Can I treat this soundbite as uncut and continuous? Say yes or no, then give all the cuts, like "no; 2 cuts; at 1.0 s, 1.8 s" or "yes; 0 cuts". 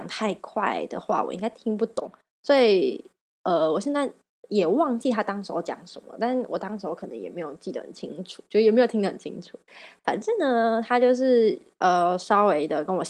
yes; 0 cuts